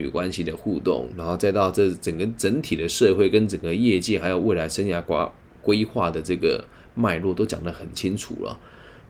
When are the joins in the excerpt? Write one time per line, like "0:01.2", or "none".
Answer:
none